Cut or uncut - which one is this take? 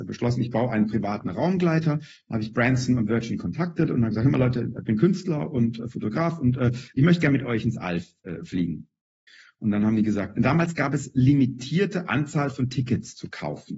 uncut